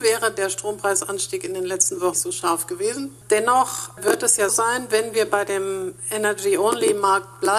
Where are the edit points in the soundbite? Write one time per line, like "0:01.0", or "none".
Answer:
0:02.1
0:04.5